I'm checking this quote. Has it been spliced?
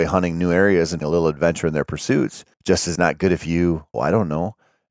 yes; 4 cuts; at 1.0 s, 2.5 s, 3.0 s, 3.9 s

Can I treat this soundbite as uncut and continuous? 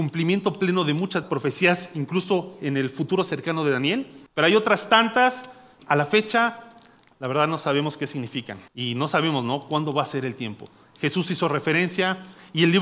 no; 4 cuts; at 1.2 s, 4.3 s, 5.8 s, 8.7 s

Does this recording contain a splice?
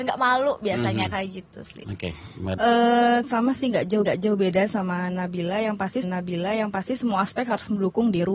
yes; 3 cuts; at 2.6 s, 4.0 s, 6.0 s

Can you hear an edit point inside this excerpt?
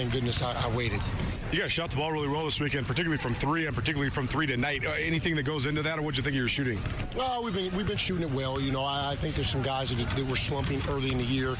no; 0 cuts

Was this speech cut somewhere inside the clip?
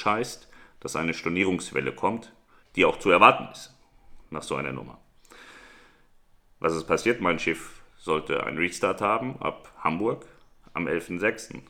yes; 1 cut; at 2.6 s

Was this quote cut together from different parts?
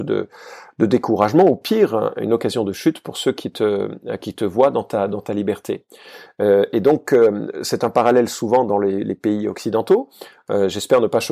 no; 0 cuts

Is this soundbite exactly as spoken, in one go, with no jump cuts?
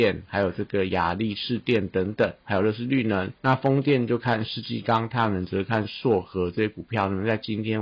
no; 1 cut; at 3.4 s

